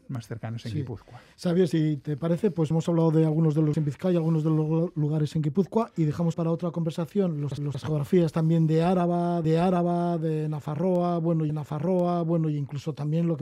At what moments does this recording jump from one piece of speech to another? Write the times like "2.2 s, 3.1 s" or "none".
2.7 s, 3.7 s, 6.3 s, 7.6 s, 9.4 s, 11.5 s